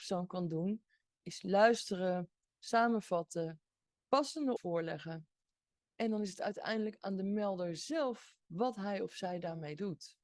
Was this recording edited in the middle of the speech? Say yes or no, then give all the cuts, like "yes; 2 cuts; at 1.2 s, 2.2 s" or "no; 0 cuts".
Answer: yes; 2 cuts; at 4.6 s, 8.4 s